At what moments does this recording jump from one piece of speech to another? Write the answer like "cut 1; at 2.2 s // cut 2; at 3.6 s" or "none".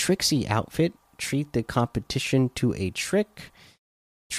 none